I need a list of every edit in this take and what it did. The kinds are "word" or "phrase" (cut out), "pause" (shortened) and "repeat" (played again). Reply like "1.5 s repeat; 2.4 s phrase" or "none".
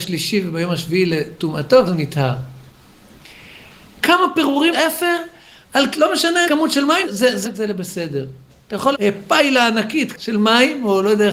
1.9 s word; 4.7 s word; 5.9 s word; 6.5 s word; 7.0 s word; 7.4 s word; 8.9 s word; 10.1 s word